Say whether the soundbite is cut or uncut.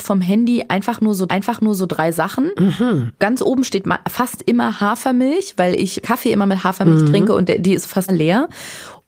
cut